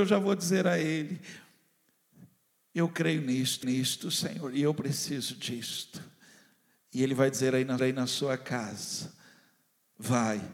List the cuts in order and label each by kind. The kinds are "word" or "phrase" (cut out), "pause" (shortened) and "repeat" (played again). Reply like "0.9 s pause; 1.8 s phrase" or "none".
3.6 s repeat; 7.8 s repeat